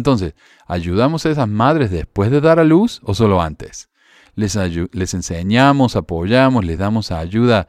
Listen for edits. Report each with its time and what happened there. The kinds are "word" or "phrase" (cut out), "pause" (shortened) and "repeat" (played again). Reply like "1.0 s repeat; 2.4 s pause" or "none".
none